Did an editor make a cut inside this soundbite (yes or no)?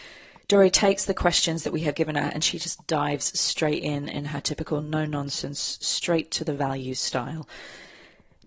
no